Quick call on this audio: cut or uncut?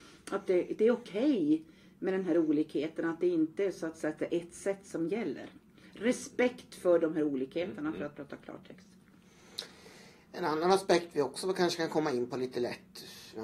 uncut